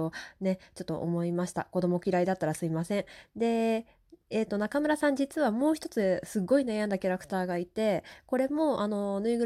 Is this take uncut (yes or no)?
yes